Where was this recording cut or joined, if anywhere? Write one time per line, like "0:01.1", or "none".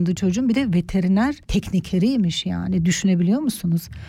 0:01.4